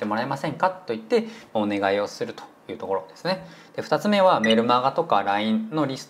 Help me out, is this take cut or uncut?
uncut